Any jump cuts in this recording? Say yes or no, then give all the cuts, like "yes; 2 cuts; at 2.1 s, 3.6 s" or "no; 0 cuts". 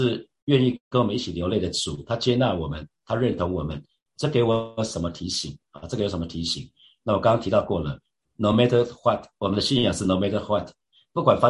no; 0 cuts